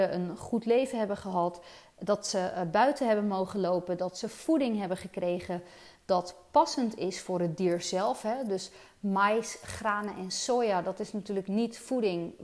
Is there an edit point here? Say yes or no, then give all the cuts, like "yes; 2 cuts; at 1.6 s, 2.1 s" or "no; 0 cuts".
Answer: no; 0 cuts